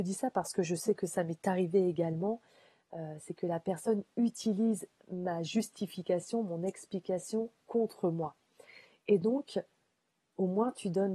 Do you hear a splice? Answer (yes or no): no